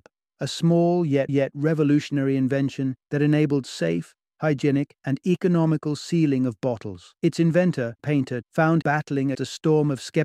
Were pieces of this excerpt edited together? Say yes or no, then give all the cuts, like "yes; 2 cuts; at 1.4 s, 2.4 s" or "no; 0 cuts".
yes; 8 cuts; at 1.3 s, 3.0 s, 5.0 s, 7.2 s, 8.0 s, 8.4 s, 8.8 s, 9.3 s